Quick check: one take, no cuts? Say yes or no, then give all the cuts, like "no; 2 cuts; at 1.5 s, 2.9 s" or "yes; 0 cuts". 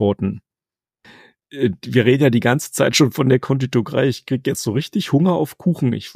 yes; 0 cuts